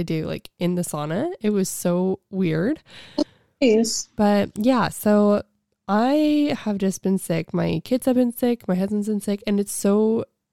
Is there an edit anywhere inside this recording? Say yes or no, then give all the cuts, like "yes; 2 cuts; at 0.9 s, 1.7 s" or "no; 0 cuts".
no; 0 cuts